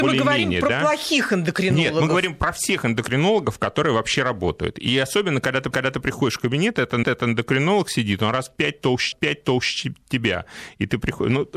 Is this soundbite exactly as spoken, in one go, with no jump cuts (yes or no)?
no